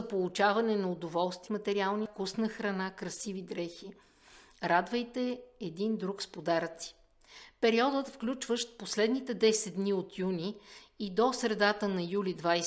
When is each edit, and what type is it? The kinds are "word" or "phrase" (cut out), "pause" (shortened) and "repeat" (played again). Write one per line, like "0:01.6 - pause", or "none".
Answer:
0:01.5 - word
0:02.1 - word